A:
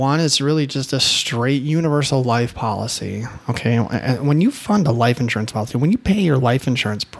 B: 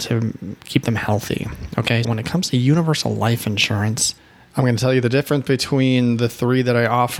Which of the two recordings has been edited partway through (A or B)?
B